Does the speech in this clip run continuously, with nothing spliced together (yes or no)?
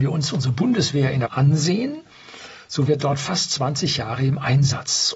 no